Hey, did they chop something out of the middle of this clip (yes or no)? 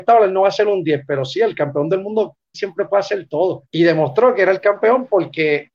yes